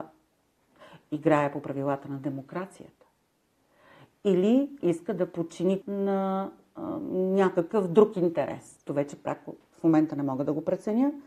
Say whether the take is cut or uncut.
cut